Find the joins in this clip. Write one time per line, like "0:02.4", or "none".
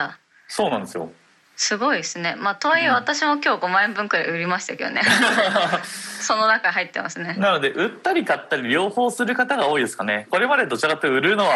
none